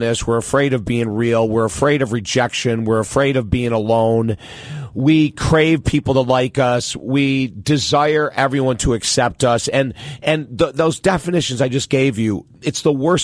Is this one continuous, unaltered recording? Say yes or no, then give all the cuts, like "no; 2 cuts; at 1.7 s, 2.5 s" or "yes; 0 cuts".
yes; 0 cuts